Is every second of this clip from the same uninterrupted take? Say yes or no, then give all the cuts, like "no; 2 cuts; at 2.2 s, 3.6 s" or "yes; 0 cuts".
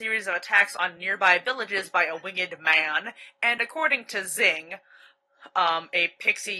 yes; 0 cuts